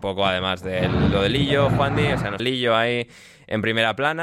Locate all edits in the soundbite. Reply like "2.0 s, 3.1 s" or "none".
2.4 s